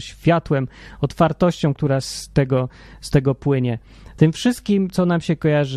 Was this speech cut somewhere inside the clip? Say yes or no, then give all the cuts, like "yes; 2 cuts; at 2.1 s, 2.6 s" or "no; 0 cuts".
yes; 1 cut; at 2.0 s